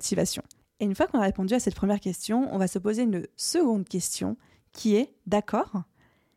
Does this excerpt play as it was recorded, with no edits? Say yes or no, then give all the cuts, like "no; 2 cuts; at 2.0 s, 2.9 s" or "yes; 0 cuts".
yes; 0 cuts